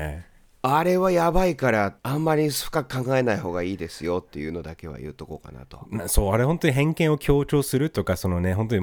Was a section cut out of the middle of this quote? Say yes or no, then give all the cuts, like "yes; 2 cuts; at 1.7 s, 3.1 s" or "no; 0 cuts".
yes; 1 cut; at 2.0 s